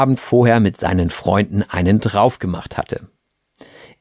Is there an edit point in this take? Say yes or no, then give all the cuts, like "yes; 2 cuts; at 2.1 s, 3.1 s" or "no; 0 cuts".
no; 0 cuts